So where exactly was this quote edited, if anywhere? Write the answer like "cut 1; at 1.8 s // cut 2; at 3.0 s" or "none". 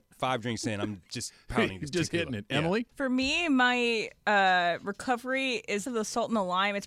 cut 1; at 2.9 s // cut 2; at 5.9 s